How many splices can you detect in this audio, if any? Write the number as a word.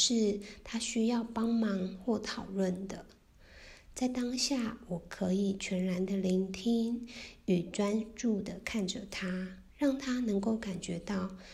one